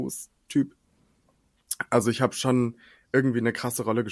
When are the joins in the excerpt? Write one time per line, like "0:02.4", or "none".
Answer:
none

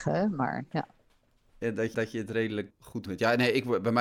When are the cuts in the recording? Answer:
0:01.9
0:02.7
0:03.1

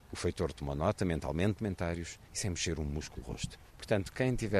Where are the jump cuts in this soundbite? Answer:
0:01.6
0:02.2
0:03.2
0:03.7

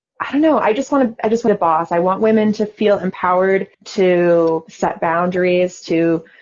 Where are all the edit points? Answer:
0:01.5
0:03.7

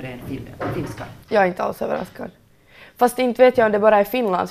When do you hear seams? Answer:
0:01.2

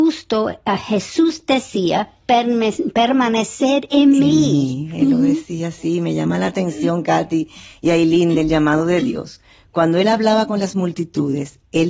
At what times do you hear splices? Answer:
none

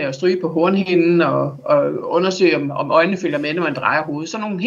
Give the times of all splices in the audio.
none

